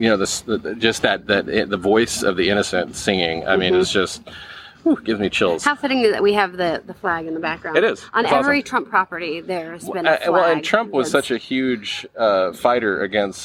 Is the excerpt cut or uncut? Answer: uncut